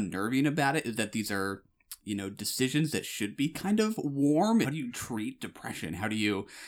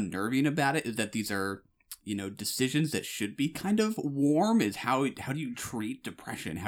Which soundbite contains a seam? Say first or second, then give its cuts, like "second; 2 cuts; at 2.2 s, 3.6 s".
first; 1 cut; at 4.6 s